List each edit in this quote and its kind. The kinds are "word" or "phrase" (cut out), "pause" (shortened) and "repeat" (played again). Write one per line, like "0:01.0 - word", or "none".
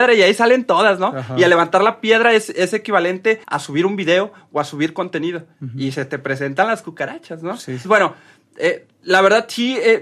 0:03.4 - pause
0:07.8 - word